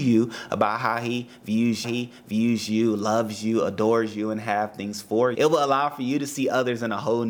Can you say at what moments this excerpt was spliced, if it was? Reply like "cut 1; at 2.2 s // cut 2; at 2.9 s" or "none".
cut 1; at 1.8 s // cut 2; at 5.3 s